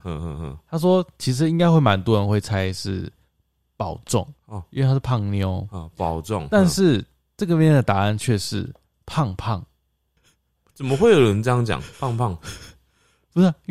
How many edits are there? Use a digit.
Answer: 2